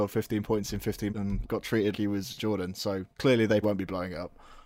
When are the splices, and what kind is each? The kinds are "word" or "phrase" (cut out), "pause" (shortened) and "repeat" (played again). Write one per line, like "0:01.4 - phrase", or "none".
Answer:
0:01.1 - word
0:01.4 - word
0:01.9 - word
0:02.4 - phrase
0:03.1 - pause
0:03.6 - word